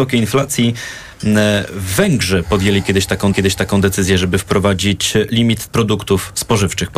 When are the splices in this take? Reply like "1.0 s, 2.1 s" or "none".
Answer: 3.3 s, 5.7 s